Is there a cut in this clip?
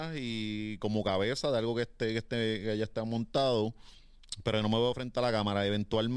no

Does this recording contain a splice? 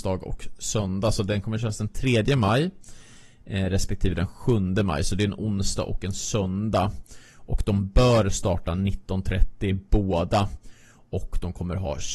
no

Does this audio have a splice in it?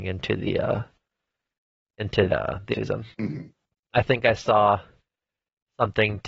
yes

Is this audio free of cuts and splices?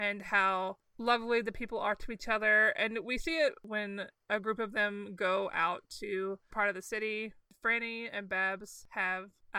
no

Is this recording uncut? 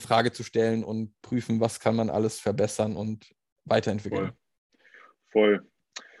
yes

